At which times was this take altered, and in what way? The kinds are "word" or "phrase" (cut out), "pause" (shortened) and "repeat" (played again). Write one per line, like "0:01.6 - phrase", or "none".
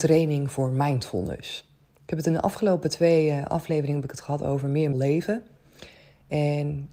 0:04.9 - word